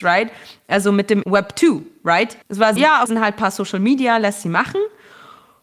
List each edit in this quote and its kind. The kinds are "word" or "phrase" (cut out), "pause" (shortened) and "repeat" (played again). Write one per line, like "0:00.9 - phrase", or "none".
0:01.2 - word
0:02.4 - pause
0:02.8 - word
0:03.1 - phrase